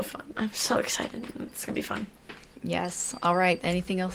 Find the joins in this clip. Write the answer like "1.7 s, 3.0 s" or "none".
none